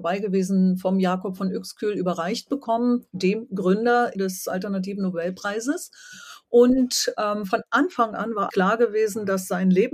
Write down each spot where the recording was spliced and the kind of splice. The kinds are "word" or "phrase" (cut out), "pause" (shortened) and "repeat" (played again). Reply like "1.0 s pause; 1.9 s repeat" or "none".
4.1 s word; 8.5 s word